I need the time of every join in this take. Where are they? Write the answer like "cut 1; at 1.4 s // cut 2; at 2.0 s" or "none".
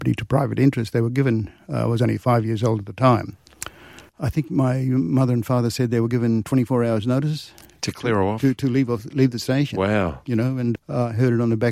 cut 1; at 4.1 s // cut 2; at 10.8 s